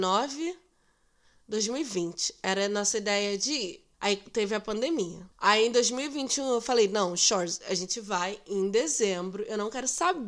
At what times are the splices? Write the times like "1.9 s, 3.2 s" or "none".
3.9 s, 5.3 s